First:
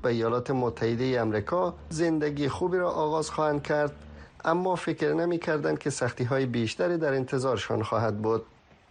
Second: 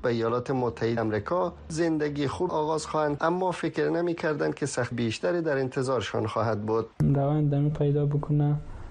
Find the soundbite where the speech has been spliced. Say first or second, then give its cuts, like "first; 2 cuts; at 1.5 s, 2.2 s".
second; 6 cuts; at 1.0 s, 2.5 s, 3.2 s, 4.9 s, 6.9 s, 7.7 s